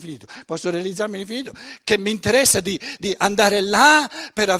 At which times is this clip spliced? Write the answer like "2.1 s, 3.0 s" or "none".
none